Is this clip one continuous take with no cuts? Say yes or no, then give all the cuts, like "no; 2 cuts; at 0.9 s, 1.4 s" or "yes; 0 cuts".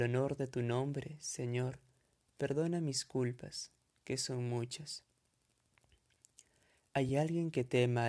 yes; 0 cuts